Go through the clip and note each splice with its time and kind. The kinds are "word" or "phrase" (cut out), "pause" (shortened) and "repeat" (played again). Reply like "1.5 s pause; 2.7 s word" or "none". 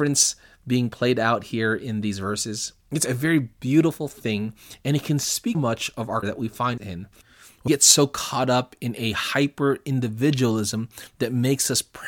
3.1 s word; 5.5 s word; 6.2 s word; 6.8 s word; 7.7 s word

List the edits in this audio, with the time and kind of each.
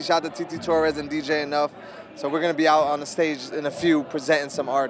none

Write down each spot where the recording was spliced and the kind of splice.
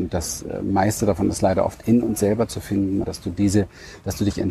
3.0 s word

